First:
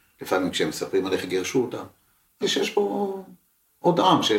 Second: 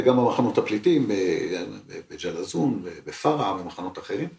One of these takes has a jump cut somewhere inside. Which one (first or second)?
first